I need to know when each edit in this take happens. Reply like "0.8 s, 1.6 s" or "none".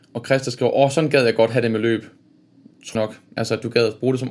2.9 s